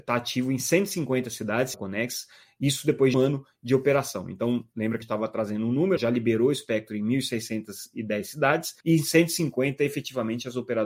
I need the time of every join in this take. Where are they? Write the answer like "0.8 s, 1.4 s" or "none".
1.7 s, 3.1 s, 5.0 s, 6.0 s, 8.8 s